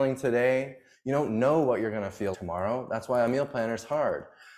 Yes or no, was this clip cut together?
yes